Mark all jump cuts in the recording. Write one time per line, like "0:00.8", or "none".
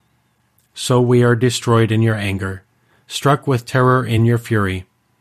none